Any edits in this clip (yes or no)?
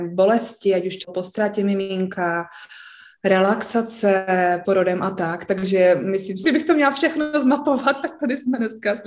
yes